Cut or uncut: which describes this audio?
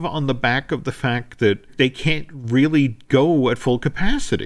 uncut